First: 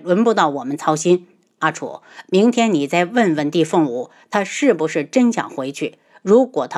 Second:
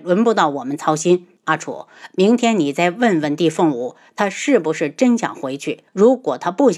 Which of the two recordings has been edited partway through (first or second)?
second